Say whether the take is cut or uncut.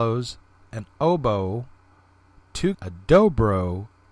cut